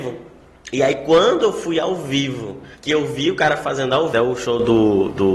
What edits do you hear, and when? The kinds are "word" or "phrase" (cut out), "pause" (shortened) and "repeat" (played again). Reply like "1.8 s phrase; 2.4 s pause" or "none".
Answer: 2.7 s pause; 4.1 s phrase